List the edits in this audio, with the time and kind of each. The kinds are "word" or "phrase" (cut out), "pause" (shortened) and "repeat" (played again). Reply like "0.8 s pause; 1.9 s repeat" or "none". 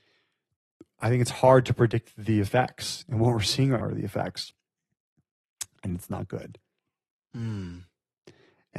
3.8 s word